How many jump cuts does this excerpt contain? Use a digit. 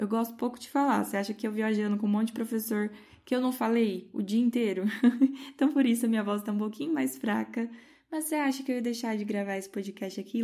0